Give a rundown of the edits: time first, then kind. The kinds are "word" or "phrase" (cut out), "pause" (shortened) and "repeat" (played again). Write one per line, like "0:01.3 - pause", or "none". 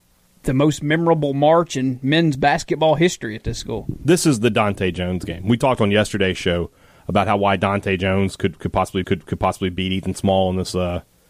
0:09.0 - repeat